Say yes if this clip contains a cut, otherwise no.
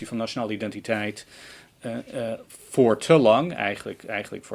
no